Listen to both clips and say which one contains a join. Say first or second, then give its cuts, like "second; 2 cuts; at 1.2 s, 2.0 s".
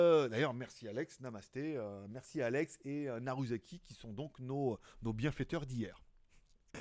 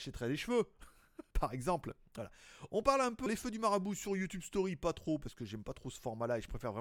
second; 2 cuts; at 1.3 s, 3.3 s